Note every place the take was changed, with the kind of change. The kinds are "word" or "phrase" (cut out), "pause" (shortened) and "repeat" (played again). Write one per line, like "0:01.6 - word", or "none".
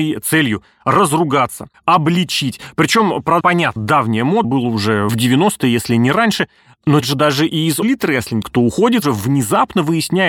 0:01.7 - word
0:03.4 - word
0:03.8 - word
0:04.4 - word
0:05.1 - word
0:07.0 - word
0:07.8 - word
0:08.4 - word
0:09.0 - word